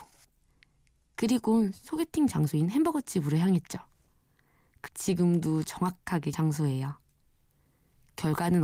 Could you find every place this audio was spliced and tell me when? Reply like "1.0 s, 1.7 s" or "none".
4.9 s, 6.3 s